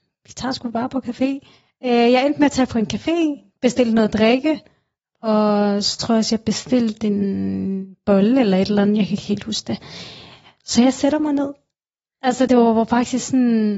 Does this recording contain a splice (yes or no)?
yes